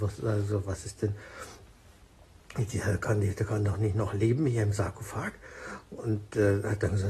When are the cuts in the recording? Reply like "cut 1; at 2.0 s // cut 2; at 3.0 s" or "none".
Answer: cut 1; at 1.0 s